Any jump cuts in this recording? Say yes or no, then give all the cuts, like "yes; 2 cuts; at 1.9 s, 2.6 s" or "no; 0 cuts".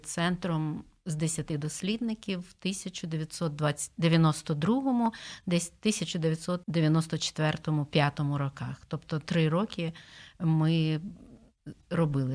yes; 1 cut; at 6.6 s